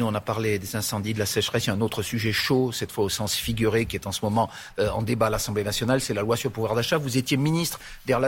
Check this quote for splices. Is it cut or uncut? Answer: uncut